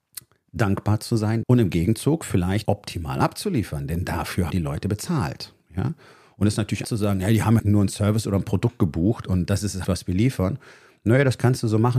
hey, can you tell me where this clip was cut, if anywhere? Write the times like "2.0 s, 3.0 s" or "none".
1.4 s, 2.7 s, 4.5 s, 6.8 s, 7.6 s, 9.8 s